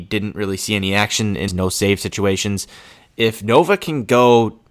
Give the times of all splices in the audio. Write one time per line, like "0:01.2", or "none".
0:01.5